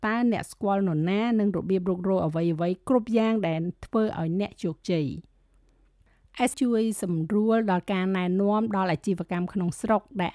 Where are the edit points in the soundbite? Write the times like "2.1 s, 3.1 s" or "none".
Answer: 6.5 s